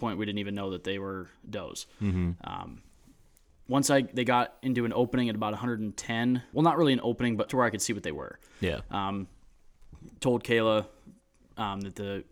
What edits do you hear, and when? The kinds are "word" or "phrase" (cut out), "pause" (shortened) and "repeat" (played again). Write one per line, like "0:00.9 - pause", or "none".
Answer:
0:06.5 - word
0:07.5 - word